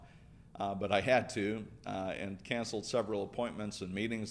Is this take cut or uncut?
uncut